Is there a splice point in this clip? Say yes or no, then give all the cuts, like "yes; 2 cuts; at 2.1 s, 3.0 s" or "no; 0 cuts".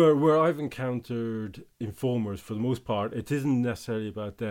no; 0 cuts